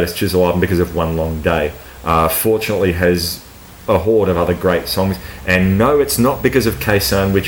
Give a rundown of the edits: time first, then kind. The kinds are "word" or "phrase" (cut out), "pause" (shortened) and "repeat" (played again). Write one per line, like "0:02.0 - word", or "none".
none